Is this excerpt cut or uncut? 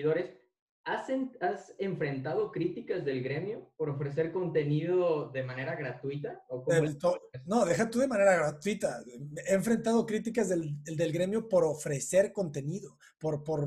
uncut